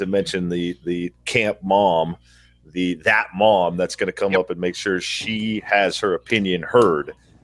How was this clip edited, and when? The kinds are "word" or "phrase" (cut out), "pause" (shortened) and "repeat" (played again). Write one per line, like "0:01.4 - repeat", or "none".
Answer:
none